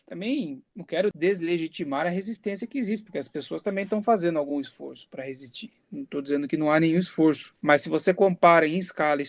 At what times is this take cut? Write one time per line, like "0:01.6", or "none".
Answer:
none